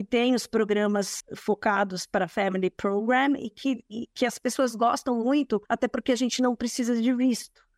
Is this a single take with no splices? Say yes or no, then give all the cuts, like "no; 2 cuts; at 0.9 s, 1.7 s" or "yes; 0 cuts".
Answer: no; 2 cuts; at 1.2 s, 5.7 s